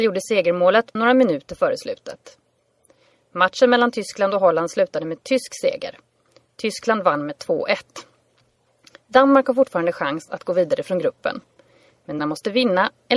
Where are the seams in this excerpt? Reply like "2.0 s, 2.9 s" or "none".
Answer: 1.0 s, 12.2 s